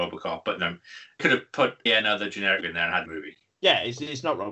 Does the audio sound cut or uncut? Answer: cut